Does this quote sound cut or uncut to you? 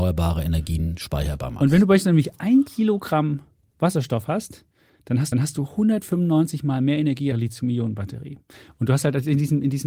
cut